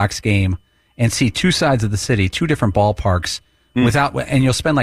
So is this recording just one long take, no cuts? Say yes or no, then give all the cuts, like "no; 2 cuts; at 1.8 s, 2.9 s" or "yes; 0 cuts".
yes; 0 cuts